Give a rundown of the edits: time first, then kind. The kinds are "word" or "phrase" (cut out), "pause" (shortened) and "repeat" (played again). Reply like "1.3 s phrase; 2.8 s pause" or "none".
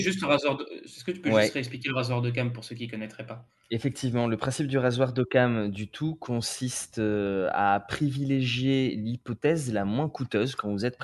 none